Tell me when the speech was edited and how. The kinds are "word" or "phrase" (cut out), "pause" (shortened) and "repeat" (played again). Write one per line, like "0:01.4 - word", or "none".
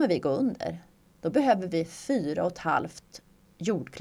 none